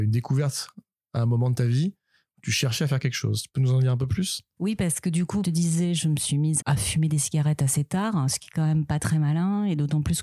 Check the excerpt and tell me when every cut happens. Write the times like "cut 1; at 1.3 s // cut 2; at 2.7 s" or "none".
cut 1; at 4.6 s // cut 2; at 5.4 s // cut 3; at 6.6 s